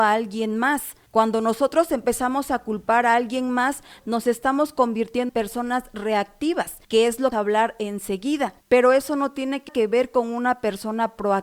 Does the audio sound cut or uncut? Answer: cut